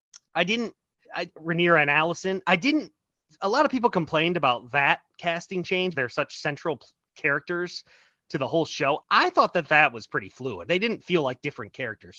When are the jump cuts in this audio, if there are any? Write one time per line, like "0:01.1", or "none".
0:01.0
0:05.9
0:09.0
0:10.6